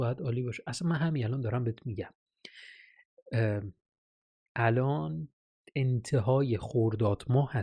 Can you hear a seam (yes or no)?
no